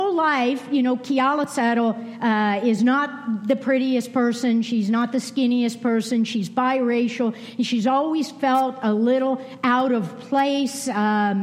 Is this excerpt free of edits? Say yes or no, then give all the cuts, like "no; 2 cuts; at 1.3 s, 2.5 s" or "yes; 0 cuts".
yes; 0 cuts